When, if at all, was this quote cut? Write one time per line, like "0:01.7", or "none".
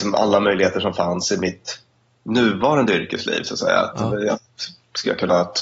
0:03.9